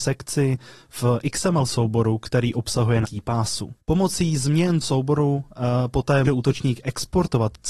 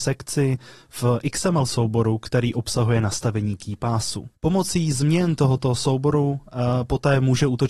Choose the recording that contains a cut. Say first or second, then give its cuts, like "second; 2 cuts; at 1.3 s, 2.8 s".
first; 3 cuts; at 3.0 s, 4.8 s, 6.2 s